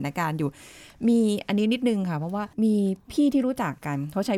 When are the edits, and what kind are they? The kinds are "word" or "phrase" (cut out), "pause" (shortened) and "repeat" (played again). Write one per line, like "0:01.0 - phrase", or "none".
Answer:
0:02.5 - pause